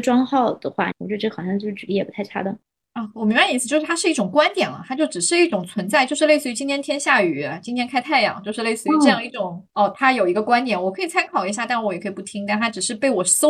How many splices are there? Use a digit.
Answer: 3